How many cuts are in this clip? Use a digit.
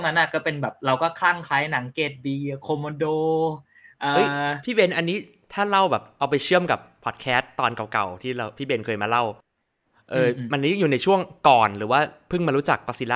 0